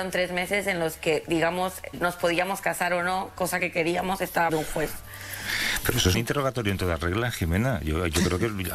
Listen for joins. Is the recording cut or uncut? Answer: cut